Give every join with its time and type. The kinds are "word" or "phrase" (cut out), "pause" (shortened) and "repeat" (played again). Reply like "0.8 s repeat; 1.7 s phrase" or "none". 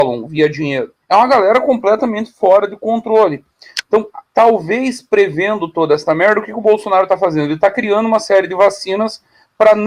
1.0 s pause